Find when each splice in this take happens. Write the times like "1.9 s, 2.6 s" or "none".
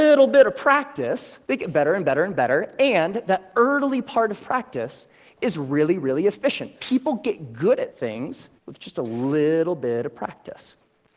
1.4 s, 8.6 s